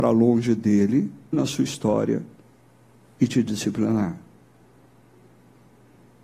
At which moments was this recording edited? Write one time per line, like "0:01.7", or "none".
0:01.3